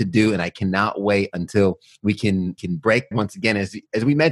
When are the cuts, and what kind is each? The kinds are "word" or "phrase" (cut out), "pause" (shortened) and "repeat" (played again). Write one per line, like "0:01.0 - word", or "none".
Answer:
0:02.6 - word
0:03.1 - word